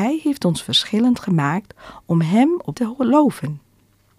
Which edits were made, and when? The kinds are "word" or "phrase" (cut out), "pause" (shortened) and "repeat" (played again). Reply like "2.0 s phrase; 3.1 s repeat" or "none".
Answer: 2.7 s phrase